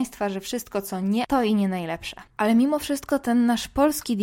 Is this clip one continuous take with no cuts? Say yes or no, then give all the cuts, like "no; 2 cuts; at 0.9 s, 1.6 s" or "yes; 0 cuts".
no; 2 cuts; at 1.2 s, 2.3 s